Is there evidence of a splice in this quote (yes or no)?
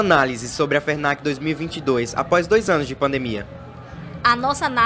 no